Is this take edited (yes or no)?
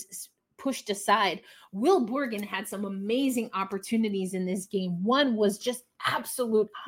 no